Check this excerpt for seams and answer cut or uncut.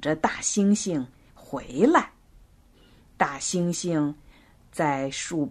uncut